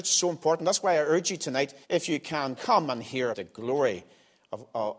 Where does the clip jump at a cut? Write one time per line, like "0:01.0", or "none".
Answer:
0:01.8
0:02.6
0:03.3

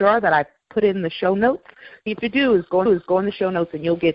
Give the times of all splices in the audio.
0:02.1
0:02.9

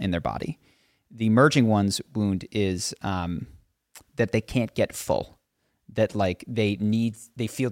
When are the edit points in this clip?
none

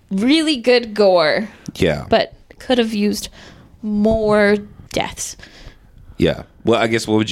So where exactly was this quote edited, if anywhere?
0:04.9

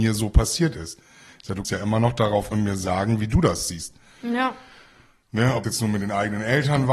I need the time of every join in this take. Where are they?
0:01.6
0:02.5
0:05.6

